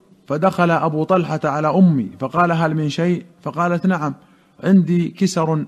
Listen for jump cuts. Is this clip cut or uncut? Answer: uncut